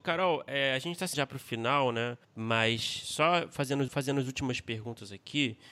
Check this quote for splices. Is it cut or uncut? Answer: cut